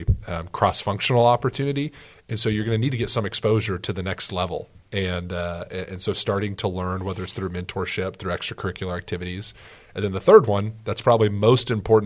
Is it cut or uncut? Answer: uncut